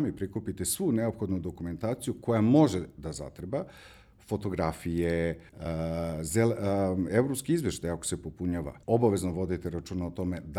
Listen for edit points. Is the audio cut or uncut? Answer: cut